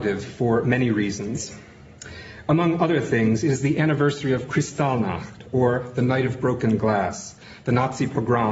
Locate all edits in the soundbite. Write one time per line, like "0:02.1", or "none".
none